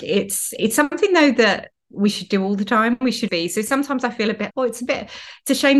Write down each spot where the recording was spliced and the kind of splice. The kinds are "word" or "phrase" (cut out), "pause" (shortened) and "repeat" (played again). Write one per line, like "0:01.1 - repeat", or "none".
0:03.3 - word
0:04.5 - word